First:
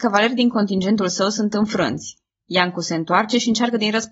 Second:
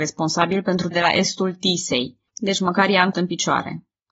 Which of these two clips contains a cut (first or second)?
second